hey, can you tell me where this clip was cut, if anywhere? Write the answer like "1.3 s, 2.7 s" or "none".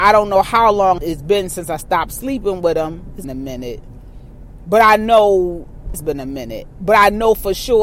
1.0 s, 3.2 s, 5.9 s